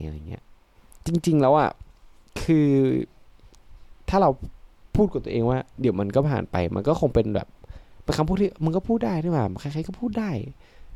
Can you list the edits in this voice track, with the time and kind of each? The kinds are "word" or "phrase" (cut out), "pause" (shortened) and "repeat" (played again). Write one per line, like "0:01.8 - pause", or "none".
none